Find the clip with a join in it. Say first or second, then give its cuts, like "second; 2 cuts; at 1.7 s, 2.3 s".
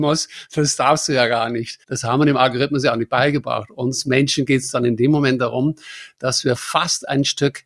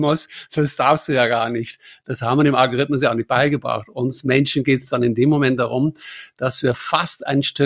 first; 1 cut; at 1.8 s